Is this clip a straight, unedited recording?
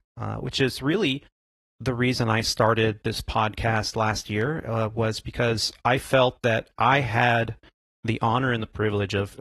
yes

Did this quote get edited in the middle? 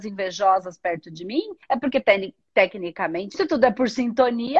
yes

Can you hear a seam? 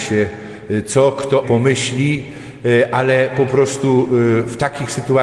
yes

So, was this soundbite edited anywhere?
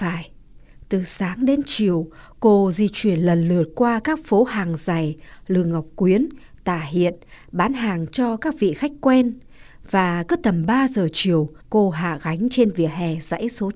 yes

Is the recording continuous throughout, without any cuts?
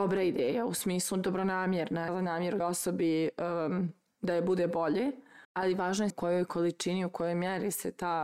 no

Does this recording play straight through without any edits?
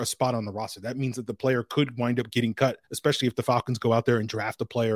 no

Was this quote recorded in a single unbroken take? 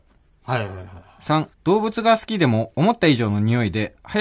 no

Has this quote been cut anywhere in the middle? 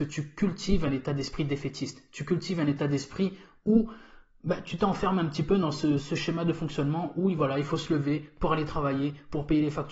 no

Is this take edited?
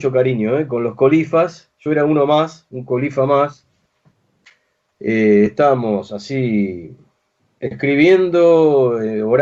no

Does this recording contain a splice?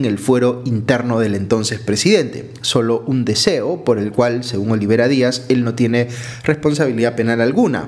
no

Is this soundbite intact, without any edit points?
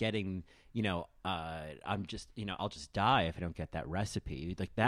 yes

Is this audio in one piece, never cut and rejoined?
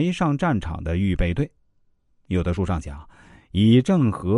yes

